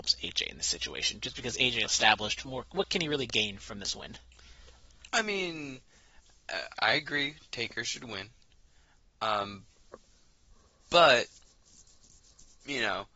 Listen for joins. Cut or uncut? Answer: cut